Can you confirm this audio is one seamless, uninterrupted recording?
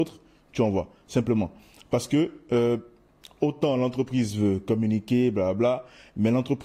yes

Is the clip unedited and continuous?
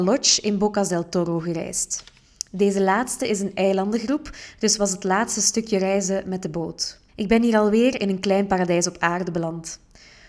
no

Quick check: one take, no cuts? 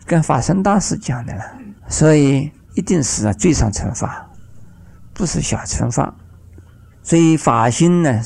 no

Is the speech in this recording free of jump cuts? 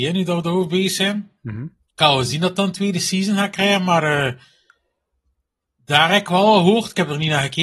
yes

